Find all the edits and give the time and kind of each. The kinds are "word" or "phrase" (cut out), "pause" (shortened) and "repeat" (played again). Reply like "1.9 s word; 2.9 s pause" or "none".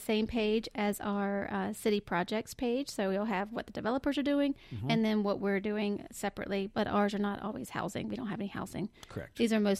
none